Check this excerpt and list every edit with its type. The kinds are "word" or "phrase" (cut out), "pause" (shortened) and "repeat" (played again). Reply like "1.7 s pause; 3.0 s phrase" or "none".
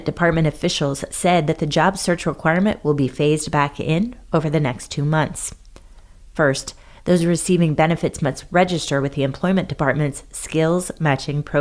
none